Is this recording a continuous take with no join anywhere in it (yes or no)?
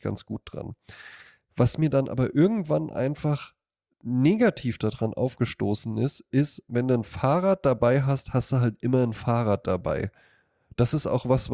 yes